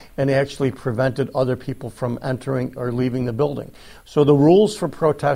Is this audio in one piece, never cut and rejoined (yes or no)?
yes